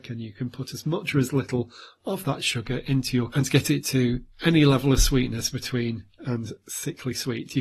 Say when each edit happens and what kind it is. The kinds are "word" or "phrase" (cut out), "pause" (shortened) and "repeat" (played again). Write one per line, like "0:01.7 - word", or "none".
0:03.3 - word
0:06.2 - word